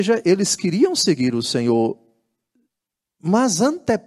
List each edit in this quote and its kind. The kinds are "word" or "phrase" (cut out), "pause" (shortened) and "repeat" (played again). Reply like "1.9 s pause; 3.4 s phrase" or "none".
none